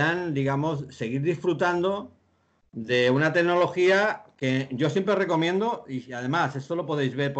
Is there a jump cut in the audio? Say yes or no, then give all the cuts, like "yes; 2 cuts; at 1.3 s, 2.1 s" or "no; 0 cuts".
no; 0 cuts